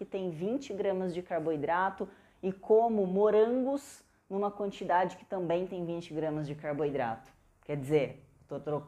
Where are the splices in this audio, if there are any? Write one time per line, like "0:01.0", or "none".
none